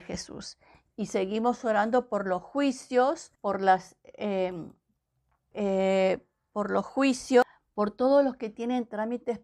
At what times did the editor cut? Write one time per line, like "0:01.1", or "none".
0:03.4
0:05.5

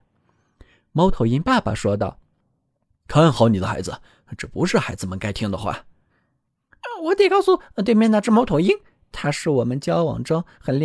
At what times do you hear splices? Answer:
none

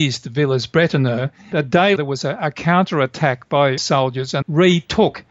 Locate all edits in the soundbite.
0:01.5
0:02.0
0:03.8
0:04.4

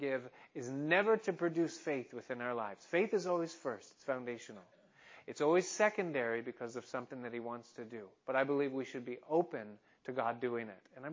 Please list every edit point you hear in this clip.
none

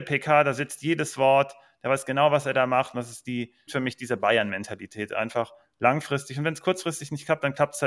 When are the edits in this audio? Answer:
0:03.7

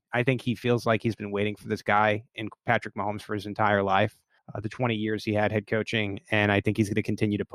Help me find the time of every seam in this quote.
0:04.4

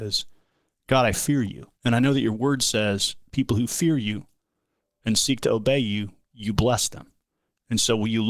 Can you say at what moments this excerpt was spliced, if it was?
0:01.8

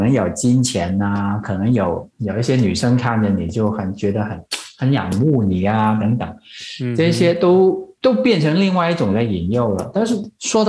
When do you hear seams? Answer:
0:08.0

